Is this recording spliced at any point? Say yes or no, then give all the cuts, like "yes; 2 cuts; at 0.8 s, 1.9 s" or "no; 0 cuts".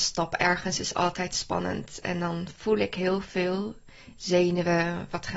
no; 0 cuts